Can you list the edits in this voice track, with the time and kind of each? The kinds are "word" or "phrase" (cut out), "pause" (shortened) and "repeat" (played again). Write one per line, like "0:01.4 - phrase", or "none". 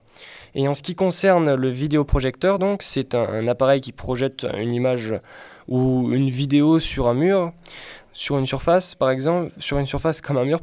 none